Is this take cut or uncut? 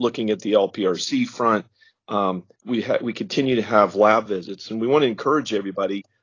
uncut